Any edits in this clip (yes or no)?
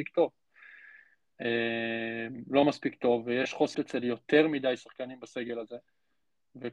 yes